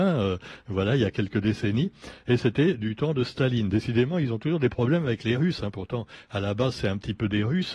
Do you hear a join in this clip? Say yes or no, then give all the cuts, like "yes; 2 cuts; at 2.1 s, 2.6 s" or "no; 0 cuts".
no; 0 cuts